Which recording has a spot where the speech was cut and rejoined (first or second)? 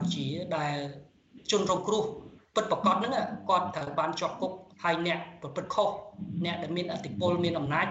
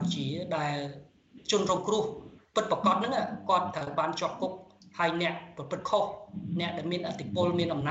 first